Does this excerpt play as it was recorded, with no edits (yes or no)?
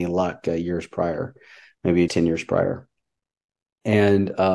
no